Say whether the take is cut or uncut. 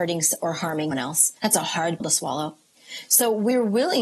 cut